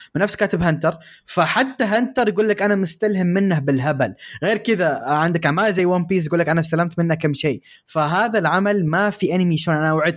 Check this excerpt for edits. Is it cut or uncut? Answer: uncut